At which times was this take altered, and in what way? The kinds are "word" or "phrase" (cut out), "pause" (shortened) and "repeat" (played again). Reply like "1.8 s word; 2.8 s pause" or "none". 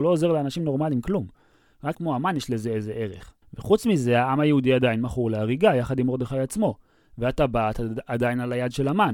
1.9 s word; 3.4 s pause